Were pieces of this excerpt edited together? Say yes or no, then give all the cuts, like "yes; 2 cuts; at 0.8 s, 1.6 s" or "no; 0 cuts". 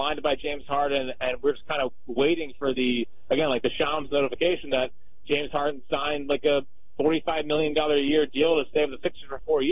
no; 0 cuts